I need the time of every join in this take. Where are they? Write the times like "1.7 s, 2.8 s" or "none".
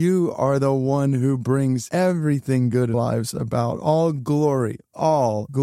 2.9 s

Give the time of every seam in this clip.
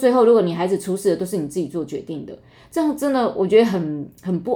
none

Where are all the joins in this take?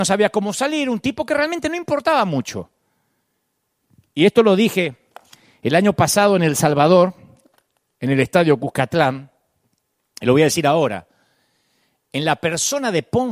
none

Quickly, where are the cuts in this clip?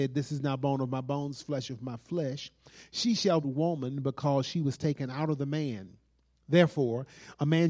3.4 s

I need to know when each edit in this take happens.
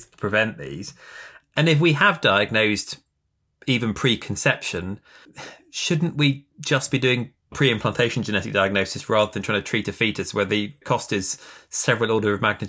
none

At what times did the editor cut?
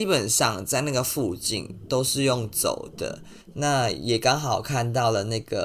3.4 s

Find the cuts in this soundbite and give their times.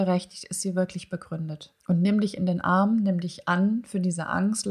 1.8 s

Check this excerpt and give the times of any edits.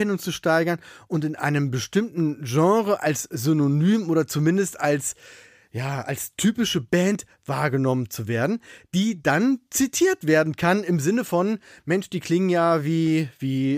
none

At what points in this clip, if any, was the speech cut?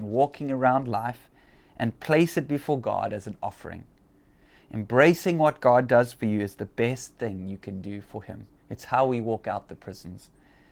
8.6 s

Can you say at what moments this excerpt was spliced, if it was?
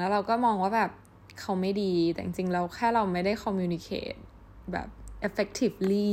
5.2 s

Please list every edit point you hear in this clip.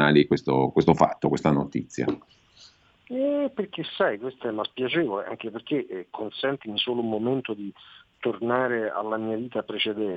4.4 s

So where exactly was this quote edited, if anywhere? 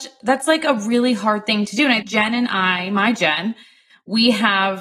2.0 s

